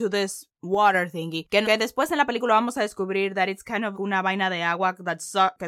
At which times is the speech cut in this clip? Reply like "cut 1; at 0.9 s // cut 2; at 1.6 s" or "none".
cut 1; at 1.6 s // cut 2; at 3.9 s